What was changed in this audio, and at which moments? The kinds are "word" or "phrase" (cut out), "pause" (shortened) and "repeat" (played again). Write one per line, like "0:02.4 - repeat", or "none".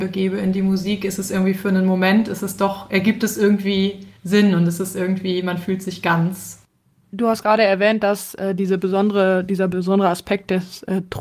0:04.2 - pause